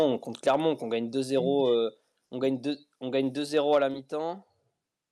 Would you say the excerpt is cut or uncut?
uncut